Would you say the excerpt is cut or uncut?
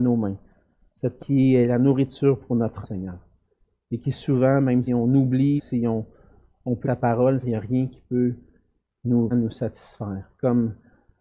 cut